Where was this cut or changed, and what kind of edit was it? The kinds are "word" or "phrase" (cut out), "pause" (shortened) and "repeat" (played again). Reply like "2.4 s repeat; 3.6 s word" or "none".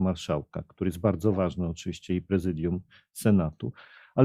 none